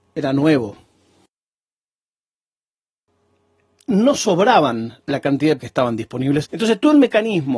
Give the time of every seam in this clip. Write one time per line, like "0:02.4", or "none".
0:05.6
0:06.4